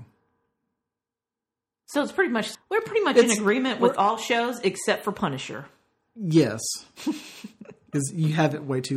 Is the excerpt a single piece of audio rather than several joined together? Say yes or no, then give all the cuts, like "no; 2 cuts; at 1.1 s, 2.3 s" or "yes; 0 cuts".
no; 1 cut; at 2.5 s